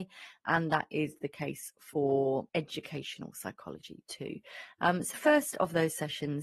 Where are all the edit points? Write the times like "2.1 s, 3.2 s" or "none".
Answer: 2.5 s, 5.1 s